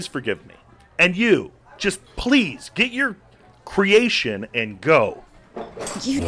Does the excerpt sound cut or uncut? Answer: uncut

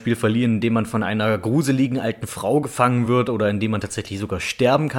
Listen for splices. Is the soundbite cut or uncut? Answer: uncut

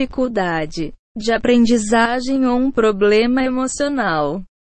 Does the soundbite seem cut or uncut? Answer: uncut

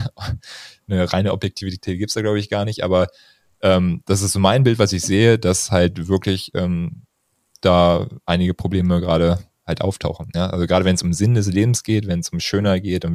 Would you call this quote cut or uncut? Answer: uncut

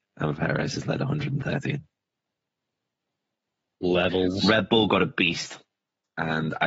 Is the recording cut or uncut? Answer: uncut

